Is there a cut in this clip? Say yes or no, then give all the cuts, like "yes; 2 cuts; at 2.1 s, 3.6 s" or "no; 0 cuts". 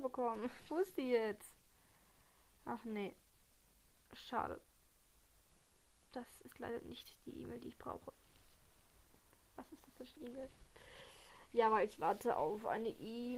yes; 1 cut; at 10.2 s